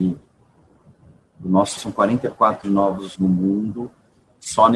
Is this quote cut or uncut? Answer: cut